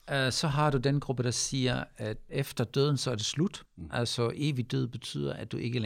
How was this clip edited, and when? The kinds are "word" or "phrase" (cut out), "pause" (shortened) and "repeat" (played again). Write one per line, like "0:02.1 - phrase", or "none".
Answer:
0:02.3 - word
0:03.7 - pause